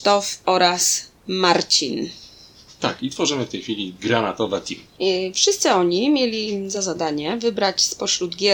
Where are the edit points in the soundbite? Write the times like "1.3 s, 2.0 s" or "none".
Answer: none